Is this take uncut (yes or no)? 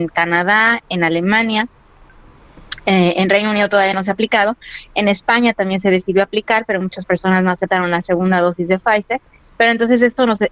yes